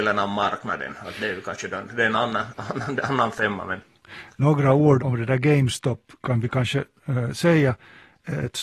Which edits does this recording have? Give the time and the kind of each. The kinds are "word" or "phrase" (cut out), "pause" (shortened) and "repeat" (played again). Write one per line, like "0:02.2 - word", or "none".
0:05.0 - word